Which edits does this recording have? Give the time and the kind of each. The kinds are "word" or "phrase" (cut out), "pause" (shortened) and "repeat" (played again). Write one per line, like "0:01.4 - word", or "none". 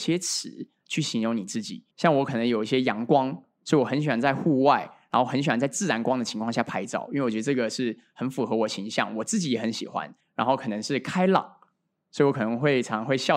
0:01.9 - pause
0:10.2 - pause